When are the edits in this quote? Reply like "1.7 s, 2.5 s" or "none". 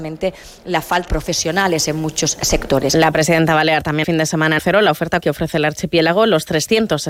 1.1 s, 4.0 s, 4.6 s, 5.2 s